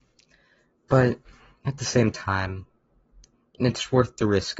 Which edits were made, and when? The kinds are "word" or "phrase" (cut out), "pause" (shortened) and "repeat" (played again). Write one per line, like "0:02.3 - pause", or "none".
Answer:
none